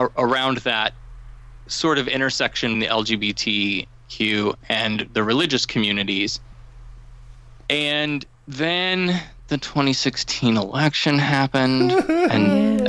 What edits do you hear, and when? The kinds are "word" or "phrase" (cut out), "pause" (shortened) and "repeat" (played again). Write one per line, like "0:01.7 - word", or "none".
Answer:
0:02.7 - word

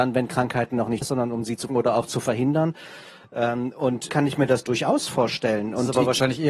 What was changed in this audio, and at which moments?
0:01.0 - word
0:01.7 - word
0:04.1 - word

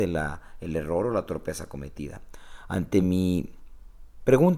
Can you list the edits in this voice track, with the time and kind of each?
none

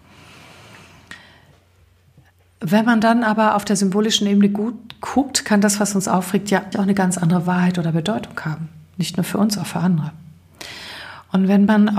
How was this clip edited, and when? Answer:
0:06.7 - word

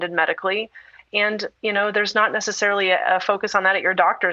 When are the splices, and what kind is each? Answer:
none

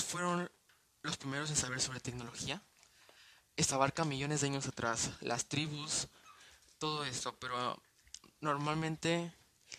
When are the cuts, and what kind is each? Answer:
0:03.7 - word

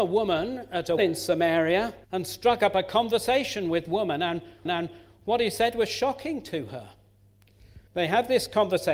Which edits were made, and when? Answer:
0:01.0 - word
0:02.0 - pause
0:03.9 - word
0:04.6 - repeat
0:07.9 - pause

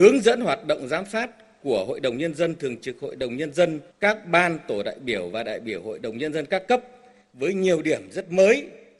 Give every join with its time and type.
0:03.9 - pause

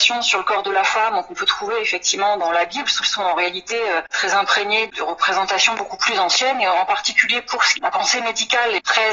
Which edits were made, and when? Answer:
0:03.0 - repeat
0:07.8 - phrase

